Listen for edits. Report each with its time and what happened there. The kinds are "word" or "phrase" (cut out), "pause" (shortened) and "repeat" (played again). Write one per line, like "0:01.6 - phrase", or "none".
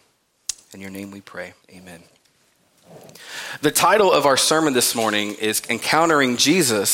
0:01.6 - pause